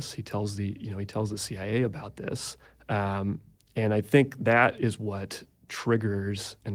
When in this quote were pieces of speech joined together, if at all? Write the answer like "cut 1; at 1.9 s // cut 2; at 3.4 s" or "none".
cut 1; at 2.6 s